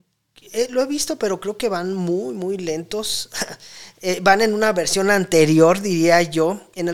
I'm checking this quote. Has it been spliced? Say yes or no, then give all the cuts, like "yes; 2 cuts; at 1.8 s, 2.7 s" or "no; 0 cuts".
no; 0 cuts